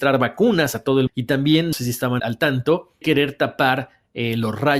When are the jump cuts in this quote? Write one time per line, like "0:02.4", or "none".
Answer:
0:01.1
0:01.7
0:02.2
0:03.0